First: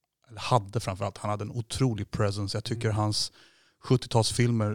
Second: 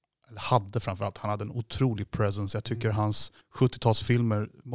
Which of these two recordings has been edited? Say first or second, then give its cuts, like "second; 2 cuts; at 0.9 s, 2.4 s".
second; 1 cut; at 3.4 s